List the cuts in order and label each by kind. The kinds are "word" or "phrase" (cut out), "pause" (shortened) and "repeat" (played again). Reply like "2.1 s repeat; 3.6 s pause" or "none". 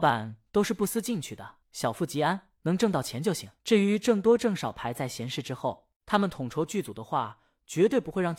1.6 s pause; 2.6 s pause; 3.6 s pause; 6.0 s pause